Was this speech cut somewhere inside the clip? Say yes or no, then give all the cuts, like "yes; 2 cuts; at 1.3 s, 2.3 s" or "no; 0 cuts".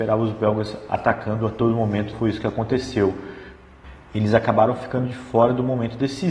yes; 1 cut; at 2.1 s